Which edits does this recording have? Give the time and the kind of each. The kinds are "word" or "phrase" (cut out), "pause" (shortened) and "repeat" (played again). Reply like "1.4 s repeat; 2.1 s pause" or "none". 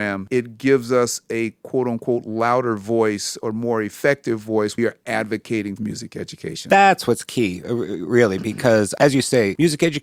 4.8 s phrase; 5.8 s phrase